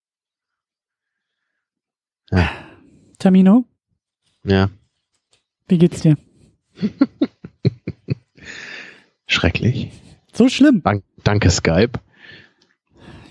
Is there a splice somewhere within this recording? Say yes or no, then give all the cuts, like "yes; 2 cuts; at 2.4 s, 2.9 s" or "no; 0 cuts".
no; 0 cuts